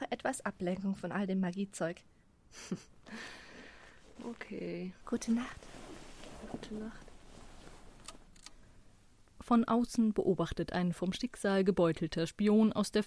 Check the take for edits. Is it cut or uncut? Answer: cut